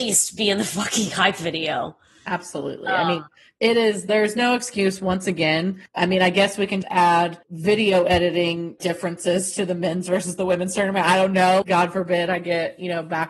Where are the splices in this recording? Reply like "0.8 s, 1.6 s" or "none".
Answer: 6.8 s, 8.8 s, 11.6 s